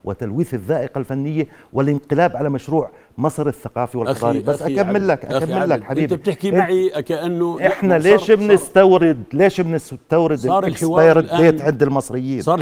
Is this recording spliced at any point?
no; 0 cuts

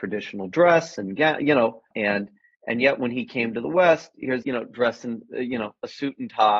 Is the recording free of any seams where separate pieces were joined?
no; 2 cuts; at 1.9 s, 4.4 s

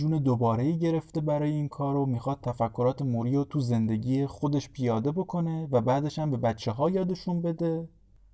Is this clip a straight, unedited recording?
yes; 0 cuts

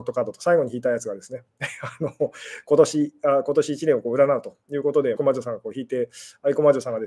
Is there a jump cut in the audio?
yes; 1 cut; at 5.2 s

